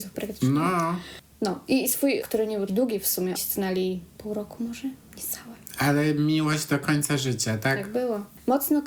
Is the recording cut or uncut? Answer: cut